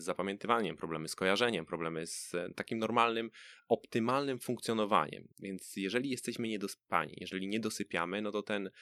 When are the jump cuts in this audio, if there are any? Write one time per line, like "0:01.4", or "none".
0:05.3

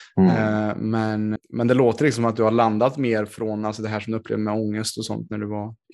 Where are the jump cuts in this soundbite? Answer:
0:01.4

